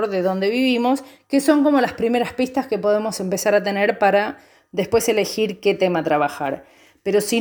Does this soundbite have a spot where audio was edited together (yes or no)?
no